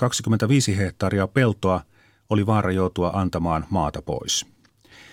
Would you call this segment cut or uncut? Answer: uncut